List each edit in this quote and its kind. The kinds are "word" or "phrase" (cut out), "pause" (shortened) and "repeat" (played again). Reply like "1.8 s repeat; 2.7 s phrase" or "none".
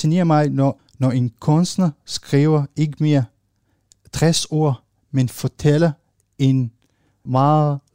none